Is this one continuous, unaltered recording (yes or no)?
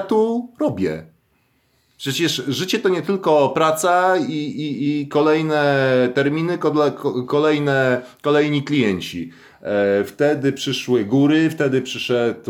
yes